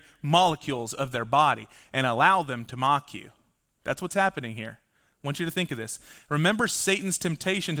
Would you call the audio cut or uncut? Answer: uncut